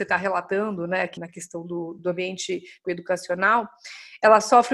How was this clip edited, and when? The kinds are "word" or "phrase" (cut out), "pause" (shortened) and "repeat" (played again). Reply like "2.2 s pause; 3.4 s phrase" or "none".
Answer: 1.2 s word; 2.0 s word; 2.8 s word